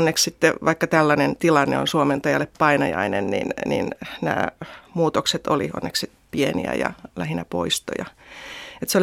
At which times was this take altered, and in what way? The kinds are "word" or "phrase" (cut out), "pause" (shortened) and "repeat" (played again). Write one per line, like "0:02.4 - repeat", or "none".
none

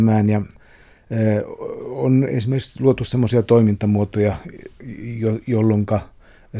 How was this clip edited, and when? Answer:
none

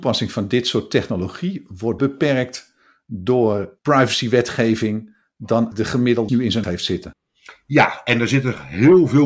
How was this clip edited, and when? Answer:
0:02.0 - word
0:05.7 - word
0:06.3 - word
0:06.6 - word

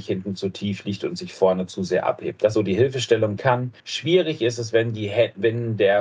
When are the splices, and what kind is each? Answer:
0:02.5 - word
0:03.4 - phrase
0:03.8 - pause

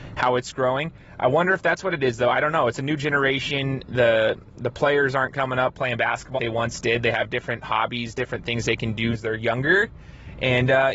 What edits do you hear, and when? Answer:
0:06.4 - word
0:09.1 - word

